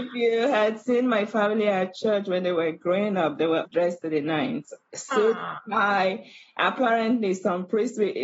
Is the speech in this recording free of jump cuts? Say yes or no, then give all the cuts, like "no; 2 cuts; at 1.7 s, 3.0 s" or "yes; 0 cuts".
no; 1 cut; at 3.7 s